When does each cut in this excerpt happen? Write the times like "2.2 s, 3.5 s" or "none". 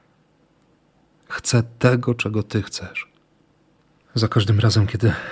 none